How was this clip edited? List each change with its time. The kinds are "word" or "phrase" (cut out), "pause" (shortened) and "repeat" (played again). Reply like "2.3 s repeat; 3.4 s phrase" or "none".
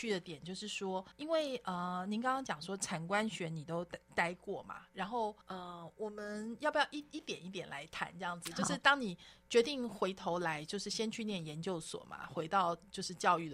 1.1 s pause; 5.4 s pause